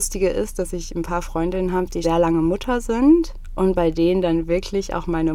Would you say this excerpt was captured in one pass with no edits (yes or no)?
no